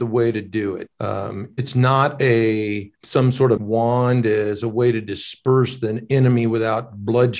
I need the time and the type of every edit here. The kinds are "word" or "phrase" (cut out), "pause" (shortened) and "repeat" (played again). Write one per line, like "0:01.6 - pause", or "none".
0:00.9 - pause
0:02.9 - pause
0:03.6 - word